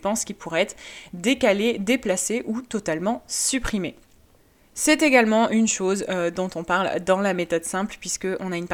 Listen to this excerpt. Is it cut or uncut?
uncut